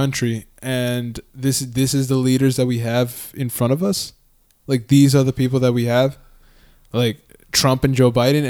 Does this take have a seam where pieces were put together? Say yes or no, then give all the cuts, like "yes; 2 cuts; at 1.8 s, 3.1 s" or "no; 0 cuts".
no; 0 cuts